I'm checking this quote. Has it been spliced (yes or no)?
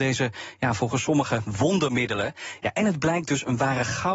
no